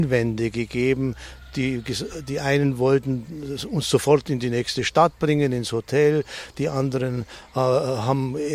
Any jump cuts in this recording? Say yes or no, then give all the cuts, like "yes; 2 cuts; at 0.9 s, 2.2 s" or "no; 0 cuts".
no; 0 cuts